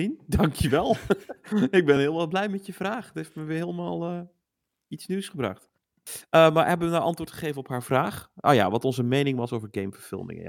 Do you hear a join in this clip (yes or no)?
no